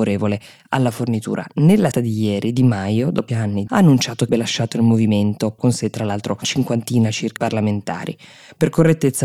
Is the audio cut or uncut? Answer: cut